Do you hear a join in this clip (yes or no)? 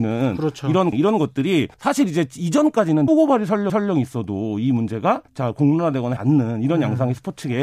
yes